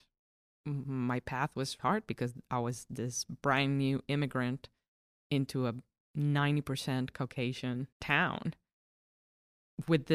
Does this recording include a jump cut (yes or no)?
yes